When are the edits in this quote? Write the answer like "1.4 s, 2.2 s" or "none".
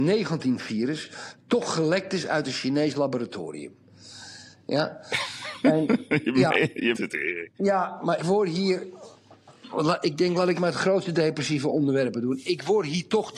6.9 s, 7.5 s, 8.2 s, 10.5 s